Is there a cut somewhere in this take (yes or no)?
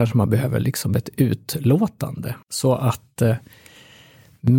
yes